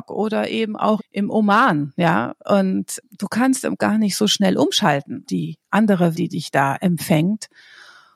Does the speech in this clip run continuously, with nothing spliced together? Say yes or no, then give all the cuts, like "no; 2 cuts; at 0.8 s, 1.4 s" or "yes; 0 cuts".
no; 4 cuts; at 1.0 s, 3.8 s, 5.2 s, 6.1 s